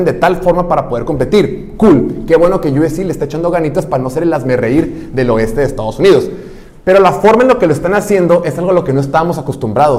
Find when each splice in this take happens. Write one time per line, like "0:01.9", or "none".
none